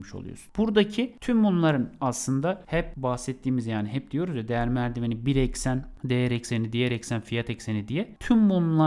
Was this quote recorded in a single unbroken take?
yes; 0 cuts

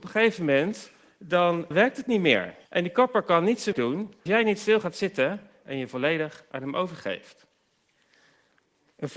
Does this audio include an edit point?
yes; 4 cuts; at 1.7 s, 2.6 s, 3.7 s, 4.3 s

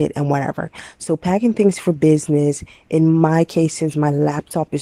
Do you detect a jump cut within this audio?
no; 0 cuts

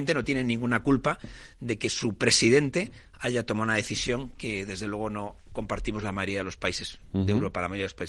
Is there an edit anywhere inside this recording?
no; 0 cuts

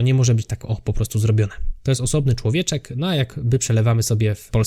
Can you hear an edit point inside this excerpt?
no; 0 cuts

